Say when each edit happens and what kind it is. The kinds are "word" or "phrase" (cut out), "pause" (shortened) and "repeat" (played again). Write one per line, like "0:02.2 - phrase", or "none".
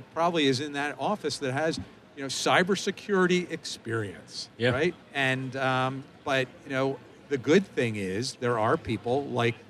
0:05.0 - pause